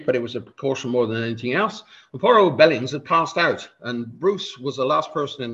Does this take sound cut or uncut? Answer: uncut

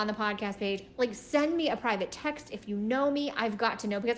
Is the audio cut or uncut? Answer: uncut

